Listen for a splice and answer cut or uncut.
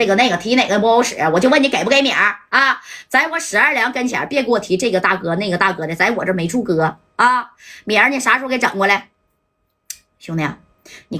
uncut